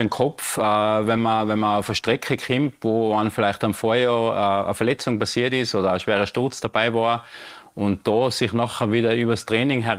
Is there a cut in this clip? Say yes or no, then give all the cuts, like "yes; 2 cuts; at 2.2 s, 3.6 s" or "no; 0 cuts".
no; 0 cuts